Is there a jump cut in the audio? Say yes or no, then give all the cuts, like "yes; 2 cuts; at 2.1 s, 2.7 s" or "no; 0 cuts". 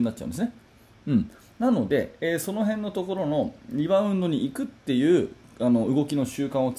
no; 0 cuts